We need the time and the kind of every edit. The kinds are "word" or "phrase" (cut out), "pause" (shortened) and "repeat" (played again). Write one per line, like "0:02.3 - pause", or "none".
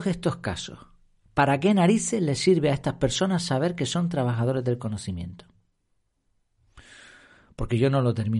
none